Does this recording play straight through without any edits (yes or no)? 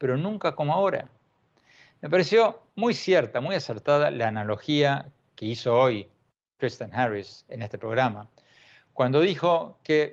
yes